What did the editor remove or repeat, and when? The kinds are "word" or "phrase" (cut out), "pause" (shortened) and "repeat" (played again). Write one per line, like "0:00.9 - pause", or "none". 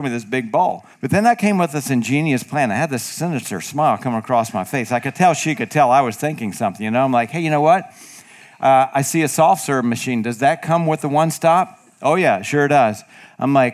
0:00.9 - pause